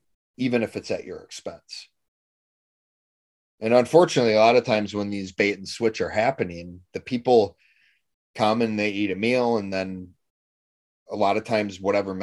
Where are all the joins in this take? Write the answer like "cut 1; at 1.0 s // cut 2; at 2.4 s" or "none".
none